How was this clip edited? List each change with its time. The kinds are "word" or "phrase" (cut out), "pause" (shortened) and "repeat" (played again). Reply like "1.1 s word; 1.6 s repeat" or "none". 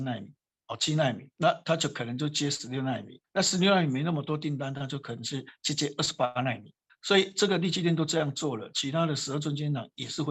1.3 s pause; 3.2 s pause; 6.9 s word